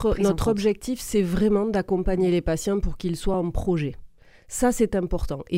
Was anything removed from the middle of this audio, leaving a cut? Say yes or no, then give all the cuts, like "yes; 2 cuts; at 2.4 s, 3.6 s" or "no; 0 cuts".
no; 0 cuts